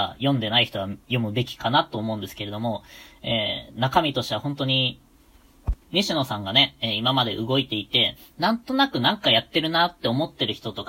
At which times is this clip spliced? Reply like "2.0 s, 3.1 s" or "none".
1.0 s, 5.8 s